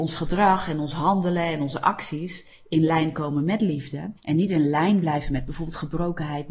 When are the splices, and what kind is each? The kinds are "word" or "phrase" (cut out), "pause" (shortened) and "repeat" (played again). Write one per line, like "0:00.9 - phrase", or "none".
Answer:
0:04.2 - pause